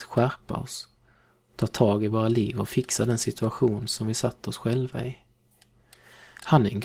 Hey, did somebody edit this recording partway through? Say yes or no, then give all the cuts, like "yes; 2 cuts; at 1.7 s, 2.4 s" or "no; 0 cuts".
no; 0 cuts